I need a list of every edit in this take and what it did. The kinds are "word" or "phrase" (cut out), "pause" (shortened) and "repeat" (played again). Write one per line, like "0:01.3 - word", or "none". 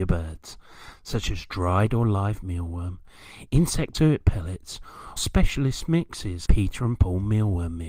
0:03.9 - word
0:05.2 - word
0:06.5 - word